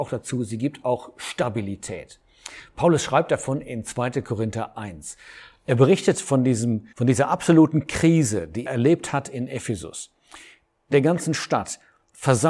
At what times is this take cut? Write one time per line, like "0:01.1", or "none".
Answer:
0:06.9
0:08.7
0:10.9